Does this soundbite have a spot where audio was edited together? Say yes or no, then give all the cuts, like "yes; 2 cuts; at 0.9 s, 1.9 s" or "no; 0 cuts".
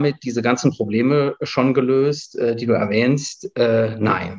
no; 0 cuts